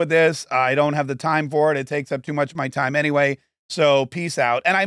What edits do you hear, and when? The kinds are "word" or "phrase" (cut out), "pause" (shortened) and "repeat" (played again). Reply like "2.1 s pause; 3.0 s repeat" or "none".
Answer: none